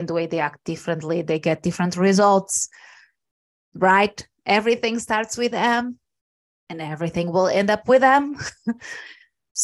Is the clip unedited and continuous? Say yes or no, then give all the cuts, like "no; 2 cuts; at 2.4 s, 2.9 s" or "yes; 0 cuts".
yes; 0 cuts